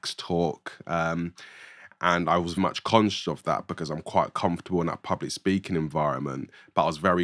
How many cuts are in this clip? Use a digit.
1